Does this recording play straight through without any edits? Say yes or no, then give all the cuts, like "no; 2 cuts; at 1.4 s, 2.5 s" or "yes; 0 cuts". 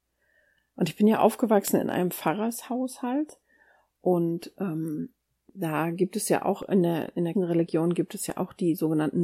no; 1 cut; at 7.3 s